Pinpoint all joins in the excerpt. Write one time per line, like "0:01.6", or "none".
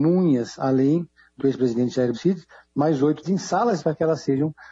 0:01.4
0:02.1
0:03.2
0:03.8